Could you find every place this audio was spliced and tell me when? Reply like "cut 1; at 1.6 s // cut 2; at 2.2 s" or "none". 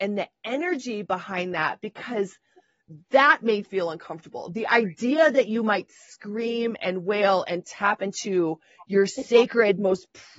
cut 1; at 3.6 s